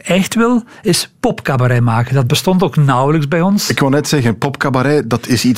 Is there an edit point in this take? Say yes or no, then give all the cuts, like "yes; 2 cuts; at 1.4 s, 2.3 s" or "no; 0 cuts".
no; 0 cuts